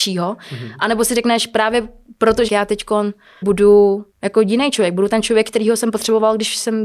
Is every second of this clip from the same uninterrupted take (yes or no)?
no